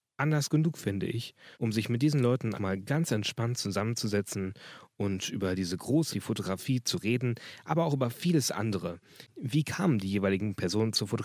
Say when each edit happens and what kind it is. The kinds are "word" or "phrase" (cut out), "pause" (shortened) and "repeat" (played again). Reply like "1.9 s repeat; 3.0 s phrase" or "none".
1.5 s pause; 2.5 s word; 6.1 s word